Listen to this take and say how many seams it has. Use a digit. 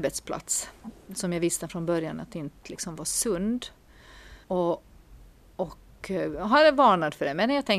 1